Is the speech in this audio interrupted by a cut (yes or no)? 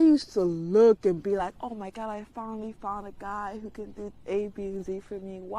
no